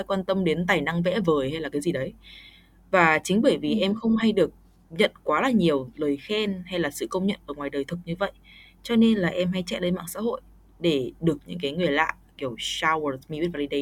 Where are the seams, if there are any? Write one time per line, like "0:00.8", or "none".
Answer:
none